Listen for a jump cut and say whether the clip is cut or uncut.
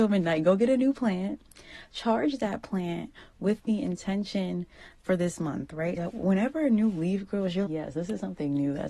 cut